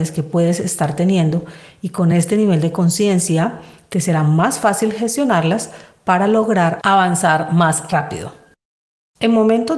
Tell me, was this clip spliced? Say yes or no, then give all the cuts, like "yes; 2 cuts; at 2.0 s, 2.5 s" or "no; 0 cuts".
no; 0 cuts